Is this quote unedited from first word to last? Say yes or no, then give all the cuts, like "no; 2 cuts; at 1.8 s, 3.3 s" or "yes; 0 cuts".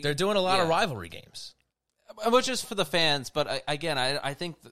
no; 1 cut; at 2.6 s